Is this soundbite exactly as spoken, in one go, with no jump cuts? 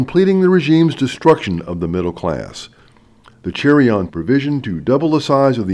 no; 1 cut; at 4.1 s

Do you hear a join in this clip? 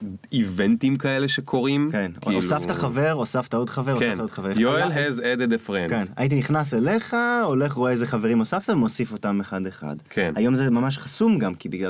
no; 0 cuts

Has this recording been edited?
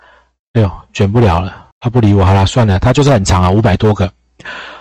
yes; 1 cut; at 1.7 s

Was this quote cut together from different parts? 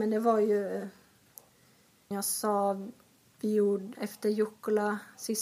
yes; 2 cuts; at 2.1 s, 3.9 s

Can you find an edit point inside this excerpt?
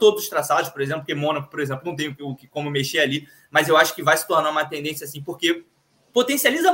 no; 0 cuts

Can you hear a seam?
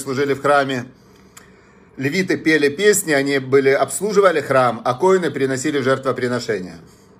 no; 0 cuts

